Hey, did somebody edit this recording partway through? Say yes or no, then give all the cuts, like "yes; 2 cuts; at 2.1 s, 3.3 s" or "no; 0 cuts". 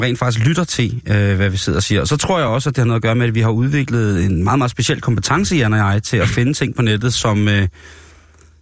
no; 0 cuts